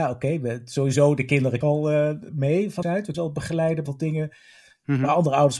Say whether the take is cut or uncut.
cut